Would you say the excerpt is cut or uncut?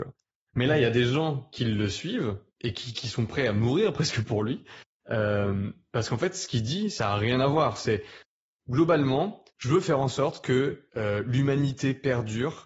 cut